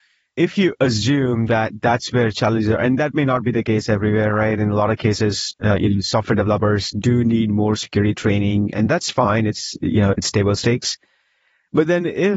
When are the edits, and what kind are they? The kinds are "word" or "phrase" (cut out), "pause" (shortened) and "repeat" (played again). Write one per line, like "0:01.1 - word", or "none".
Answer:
0:10.1 - word